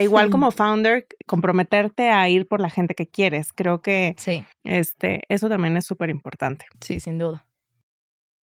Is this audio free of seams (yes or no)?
no